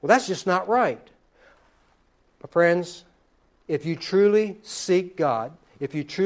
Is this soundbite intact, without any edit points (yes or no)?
yes